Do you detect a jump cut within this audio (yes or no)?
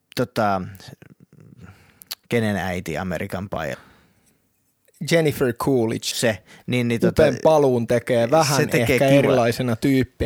yes